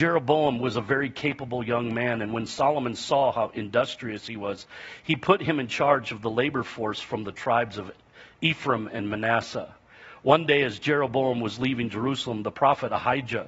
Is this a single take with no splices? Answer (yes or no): yes